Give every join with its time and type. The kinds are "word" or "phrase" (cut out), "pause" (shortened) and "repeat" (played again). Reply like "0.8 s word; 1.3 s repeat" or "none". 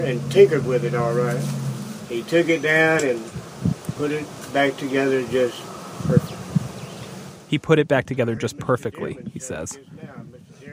none